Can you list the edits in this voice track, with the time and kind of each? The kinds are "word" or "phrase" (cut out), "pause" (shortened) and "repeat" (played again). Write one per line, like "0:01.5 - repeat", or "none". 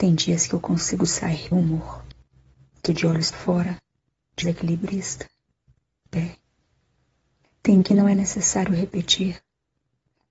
0:01.5 - word
0:02.9 - word
0:03.3 - word
0:04.4 - word
0:06.1 - word
0:07.8 - word